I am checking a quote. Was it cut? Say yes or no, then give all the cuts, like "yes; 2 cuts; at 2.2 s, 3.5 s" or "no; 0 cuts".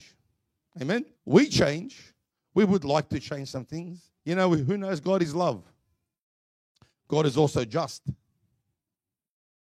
yes; 2 cuts; at 1.2 s, 4.2 s